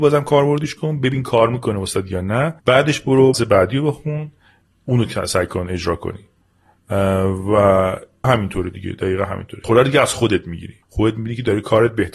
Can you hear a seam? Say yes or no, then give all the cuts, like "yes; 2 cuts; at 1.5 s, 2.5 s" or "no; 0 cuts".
yes; 5 cuts; at 2.6 s, 3.3 s, 8.2 s, 9.6 s, 10.8 s